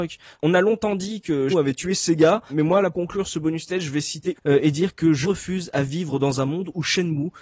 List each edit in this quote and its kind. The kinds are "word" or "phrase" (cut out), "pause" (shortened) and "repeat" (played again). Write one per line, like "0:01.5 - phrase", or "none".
0:01.5 - word
0:02.5 - word
0:02.9 - word
0:03.3 - word
0:04.4 - word
0:05.2 - word